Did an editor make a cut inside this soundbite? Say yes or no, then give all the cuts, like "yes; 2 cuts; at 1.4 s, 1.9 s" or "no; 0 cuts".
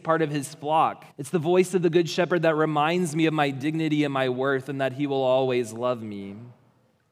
yes; 1 cut; at 1.1 s